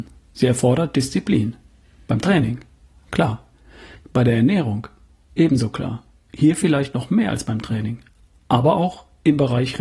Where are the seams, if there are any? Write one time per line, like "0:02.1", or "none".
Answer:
none